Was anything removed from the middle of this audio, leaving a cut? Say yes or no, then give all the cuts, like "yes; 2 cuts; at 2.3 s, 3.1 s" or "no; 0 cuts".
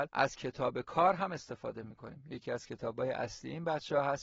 no; 0 cuts